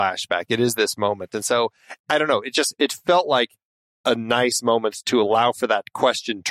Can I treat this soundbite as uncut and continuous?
yes; 0 cuts

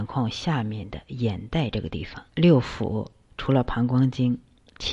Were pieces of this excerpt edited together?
yes; 1 cut; at 2.3 s

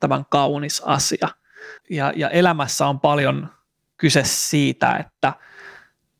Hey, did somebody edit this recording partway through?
yes; 1 cut; at 1.8 s

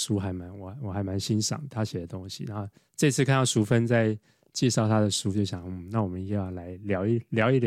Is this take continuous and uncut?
no; 1 cut; at 2.8 s

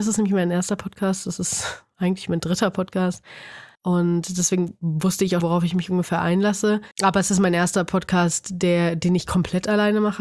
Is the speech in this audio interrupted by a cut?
yes; 3 cuts; at 3.7 s, 5.4 s, 6.9 s

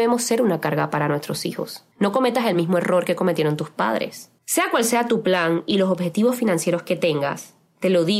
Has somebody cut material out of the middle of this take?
no; 0 cuts

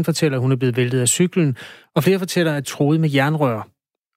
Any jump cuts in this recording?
yes; 1 cut; at 2.6 s

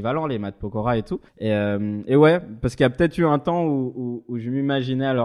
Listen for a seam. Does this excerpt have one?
yes; 1 cut; at 1.3 s

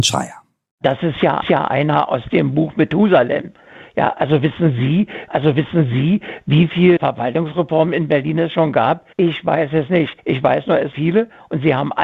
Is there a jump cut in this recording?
yes; 6 cuts; at 1.4 s, 5.3 s, 7.0 s, 9.1 s, 10.2 s, 10.9 s

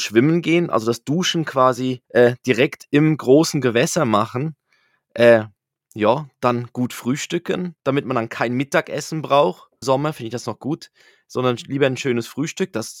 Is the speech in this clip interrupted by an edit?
yes; 3 cuts; at 2.1 s, 7.8 s, 9.8 s

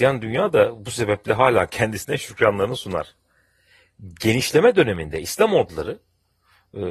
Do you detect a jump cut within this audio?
no; 0 cuts

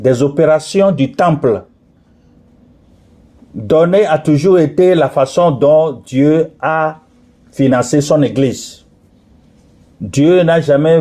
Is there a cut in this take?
no; 0 cuts

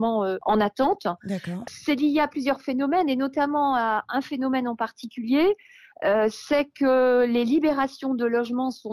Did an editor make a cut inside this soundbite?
no; 0 cuts

